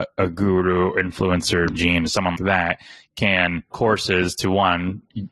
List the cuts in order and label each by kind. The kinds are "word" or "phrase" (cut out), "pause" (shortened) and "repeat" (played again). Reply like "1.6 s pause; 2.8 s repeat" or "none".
1.7 s word; 2.4 s word; 3.7 s word